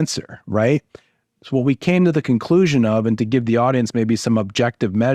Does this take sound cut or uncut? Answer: uncut